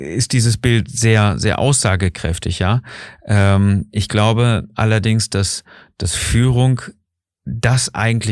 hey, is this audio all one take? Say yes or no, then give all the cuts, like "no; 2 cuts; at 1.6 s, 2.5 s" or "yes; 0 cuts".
yes; 0 cuts